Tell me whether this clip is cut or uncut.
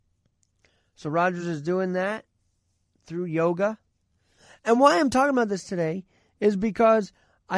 uncut